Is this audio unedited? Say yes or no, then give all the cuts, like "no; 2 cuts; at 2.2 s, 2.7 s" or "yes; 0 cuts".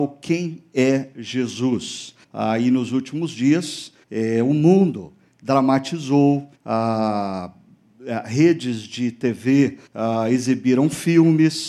no; 4 cuts; at 2.2 s, 4.0 s, 6.5 s, 9.9 s